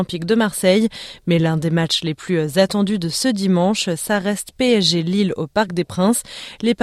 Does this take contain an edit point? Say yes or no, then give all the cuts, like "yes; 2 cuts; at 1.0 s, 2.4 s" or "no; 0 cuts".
no; 0 cuts